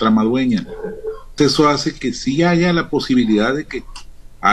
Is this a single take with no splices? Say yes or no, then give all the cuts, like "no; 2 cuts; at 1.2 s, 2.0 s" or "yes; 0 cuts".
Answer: no; 1 cut; at 1.4 s